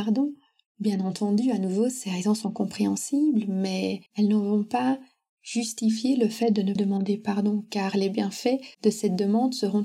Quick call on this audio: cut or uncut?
cut